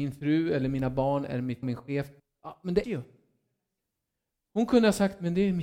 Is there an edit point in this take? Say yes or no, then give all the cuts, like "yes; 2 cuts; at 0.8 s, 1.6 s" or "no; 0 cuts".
yes; 3 cuts; at 1.6 s, 2.2 s, 2.8 s